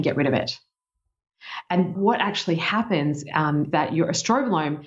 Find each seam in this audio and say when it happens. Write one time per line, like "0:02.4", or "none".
0:01.9
0:03.7